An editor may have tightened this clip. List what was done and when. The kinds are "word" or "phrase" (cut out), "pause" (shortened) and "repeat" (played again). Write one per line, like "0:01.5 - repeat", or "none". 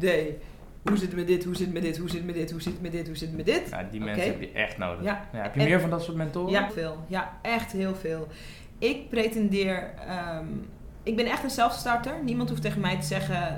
0:06.7 - word